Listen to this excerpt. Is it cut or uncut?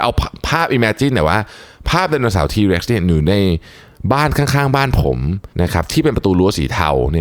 cut